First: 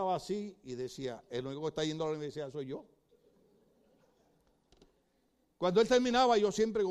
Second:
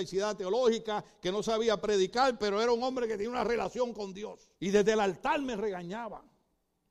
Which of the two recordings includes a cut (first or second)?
second